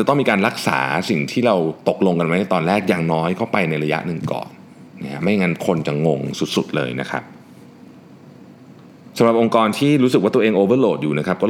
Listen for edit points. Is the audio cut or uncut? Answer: uncut